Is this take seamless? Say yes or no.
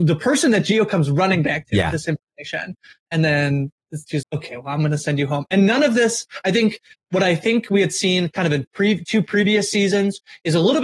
no